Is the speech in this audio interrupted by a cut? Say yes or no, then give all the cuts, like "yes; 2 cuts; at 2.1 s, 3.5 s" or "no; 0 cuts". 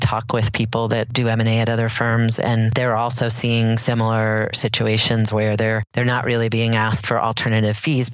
no; 0 cuts